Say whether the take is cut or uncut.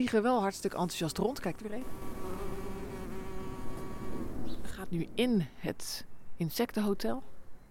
cut